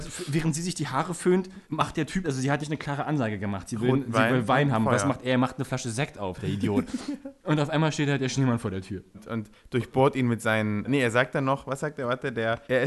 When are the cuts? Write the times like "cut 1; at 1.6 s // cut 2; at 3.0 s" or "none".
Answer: cut 1; at 2.2 s // cut 2; at 2.6 s // cut 3; at 7.4 s